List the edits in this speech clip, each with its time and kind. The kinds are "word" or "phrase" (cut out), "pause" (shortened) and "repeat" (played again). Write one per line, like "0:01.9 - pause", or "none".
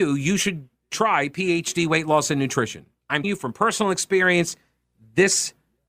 0:03.2 - word